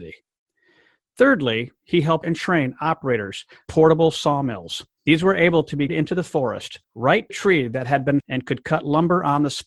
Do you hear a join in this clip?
yes; 7 cuts; at 2.2 s, 3.7 s, 5.0 s, 5.9 s, 6.8 s, 7.3 s, 8.2 s

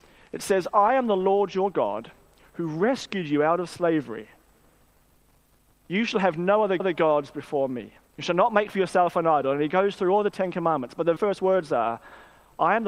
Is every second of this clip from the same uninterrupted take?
no; 3 cuts; at 6.8 s, 8.1 s, 11.2 s

